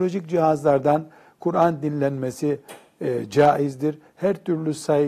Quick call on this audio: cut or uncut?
uncut